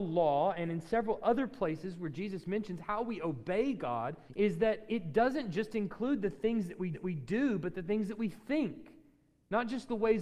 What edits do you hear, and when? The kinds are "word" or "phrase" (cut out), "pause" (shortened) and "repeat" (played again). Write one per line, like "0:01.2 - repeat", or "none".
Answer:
0:04.3 - pause
0:06.9 - repeat